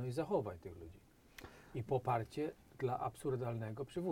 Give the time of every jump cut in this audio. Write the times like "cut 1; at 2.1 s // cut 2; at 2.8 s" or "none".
none